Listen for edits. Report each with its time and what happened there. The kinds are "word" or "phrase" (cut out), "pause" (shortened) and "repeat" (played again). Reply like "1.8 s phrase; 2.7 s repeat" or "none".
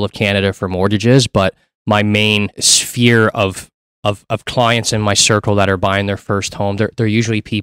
none